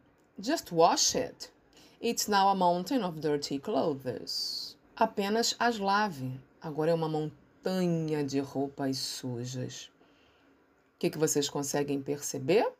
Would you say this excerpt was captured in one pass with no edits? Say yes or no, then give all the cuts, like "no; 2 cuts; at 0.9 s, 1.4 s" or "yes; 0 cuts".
no; 1 cut; at 4.8 s